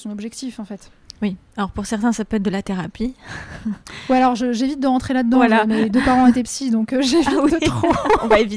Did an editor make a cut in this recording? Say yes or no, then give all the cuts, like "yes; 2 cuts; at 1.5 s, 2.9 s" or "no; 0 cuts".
no; 0 cuts